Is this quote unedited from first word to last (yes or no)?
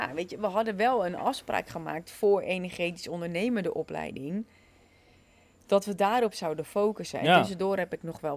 yes